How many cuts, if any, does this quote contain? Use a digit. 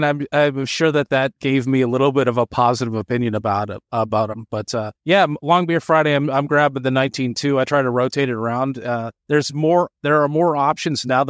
2